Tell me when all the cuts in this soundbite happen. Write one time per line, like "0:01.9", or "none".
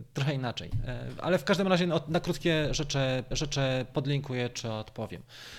0:03.3